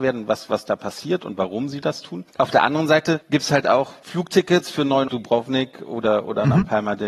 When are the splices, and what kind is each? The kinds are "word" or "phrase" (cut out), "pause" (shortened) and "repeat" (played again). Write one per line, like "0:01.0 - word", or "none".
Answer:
0:05.1 - phrase